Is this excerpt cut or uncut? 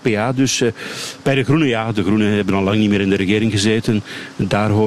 uncut